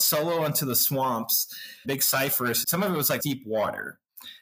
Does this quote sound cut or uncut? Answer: cut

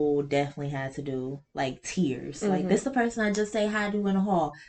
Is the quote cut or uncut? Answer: uncut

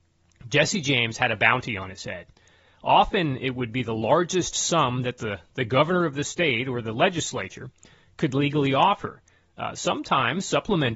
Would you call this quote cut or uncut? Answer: uncut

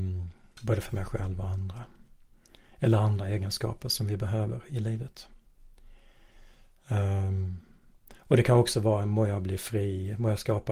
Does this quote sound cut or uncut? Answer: uncut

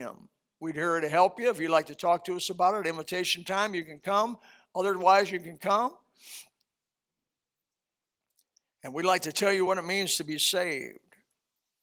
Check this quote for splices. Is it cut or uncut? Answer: uncut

